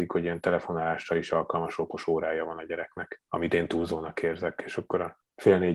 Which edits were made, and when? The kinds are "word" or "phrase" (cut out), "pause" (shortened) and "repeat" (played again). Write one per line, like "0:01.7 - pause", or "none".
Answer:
none